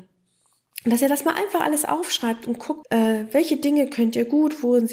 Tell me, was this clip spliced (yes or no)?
yes